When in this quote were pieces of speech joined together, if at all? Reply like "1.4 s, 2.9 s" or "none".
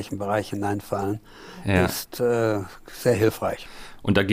none